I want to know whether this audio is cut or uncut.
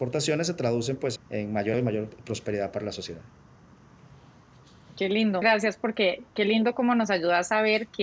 cut